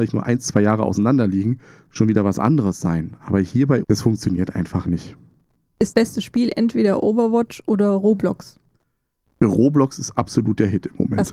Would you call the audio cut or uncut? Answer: cut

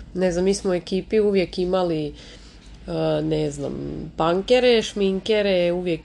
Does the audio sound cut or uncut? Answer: uncut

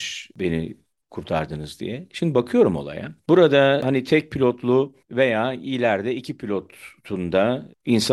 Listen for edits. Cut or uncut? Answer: cut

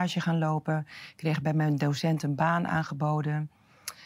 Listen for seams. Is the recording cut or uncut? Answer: uncut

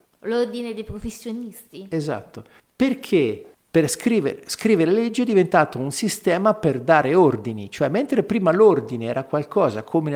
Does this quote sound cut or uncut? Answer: uncut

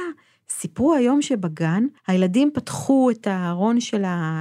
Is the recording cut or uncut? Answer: cut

